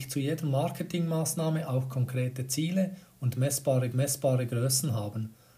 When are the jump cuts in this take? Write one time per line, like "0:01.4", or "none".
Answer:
0:03.9